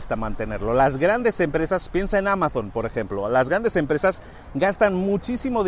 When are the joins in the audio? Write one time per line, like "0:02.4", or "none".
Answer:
none